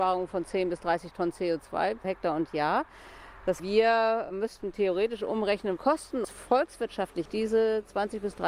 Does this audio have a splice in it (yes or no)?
yes